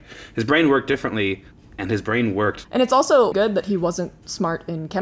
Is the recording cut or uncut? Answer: cut